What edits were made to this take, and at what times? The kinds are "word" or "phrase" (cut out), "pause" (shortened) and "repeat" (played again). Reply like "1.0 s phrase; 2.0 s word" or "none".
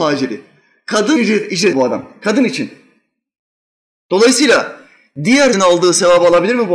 1.2 s word; 1.7 s word; 5.5 s word